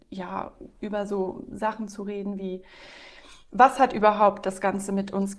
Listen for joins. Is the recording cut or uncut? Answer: uncut